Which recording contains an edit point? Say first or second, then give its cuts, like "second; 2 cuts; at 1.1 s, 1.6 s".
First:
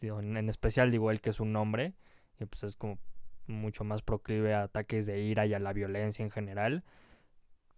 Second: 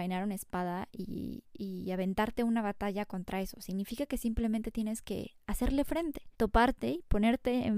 second; 1 cut; at 6.3 s